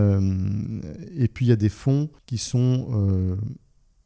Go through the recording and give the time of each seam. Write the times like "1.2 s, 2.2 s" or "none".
2.2 s